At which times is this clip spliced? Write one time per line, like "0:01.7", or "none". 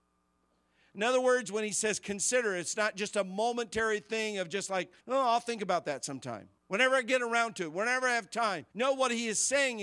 0:05.0
0:06.6
0:08.7